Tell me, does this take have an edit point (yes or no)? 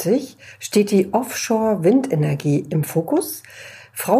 no